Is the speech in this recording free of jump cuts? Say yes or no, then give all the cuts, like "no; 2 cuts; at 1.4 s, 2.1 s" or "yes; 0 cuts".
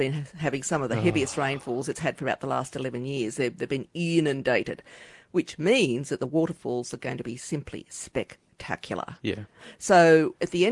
yes; 0 cuts